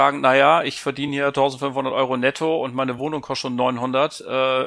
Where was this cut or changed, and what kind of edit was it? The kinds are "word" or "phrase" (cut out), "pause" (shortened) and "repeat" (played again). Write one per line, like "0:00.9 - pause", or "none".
none